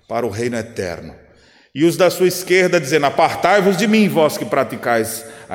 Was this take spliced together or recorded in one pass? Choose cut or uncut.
uncut